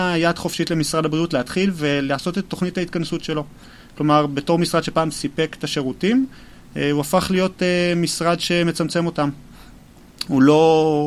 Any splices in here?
no; 0 cuts

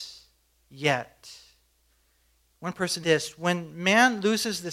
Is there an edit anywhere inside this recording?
yes; 1 cut; at 3.0 s

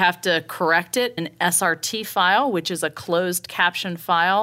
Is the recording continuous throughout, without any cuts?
no; 1 cut; at 1.2 s

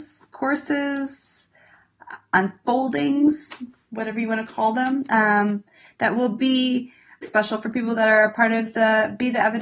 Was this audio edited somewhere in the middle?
yes; 1 cut; at 7.2 s

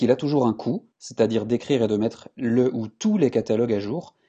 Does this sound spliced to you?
yes; 1 cut; at 0.9 s

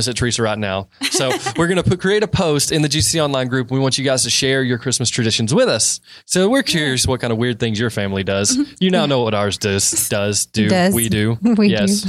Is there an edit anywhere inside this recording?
no; 0 cuts

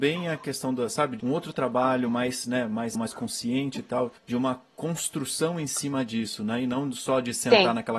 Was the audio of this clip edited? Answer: yes; 3 cuts; at 1.2 s, 2.9 s, 4.2 s

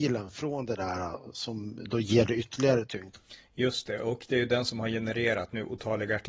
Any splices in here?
no; 0 cuts

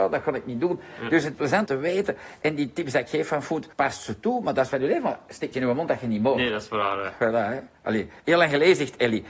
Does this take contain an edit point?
yes; 6 cuts; at 1.3 s, 1.7 s, 3.7 s, 4.7 s, 5.5 s, 8.2 s

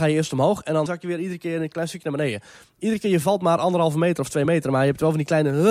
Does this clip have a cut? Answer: no; 0 cuts

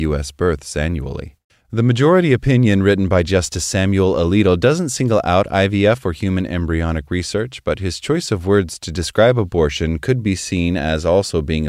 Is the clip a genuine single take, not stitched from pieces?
no; 1 cut; at 1.5 s

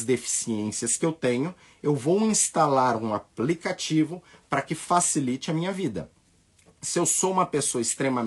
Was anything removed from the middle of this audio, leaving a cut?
no; 0 cuts

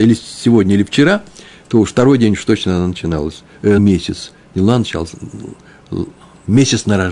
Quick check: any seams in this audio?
yes; 1 cut; at 3.8 s

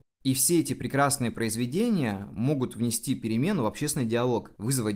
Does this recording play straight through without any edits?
yes; 0 cuts

